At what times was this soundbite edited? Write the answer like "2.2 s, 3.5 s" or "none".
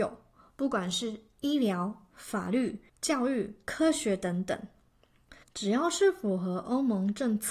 2.9 s, 5.4 s